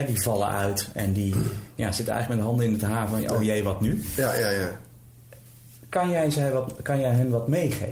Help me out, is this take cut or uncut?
uncut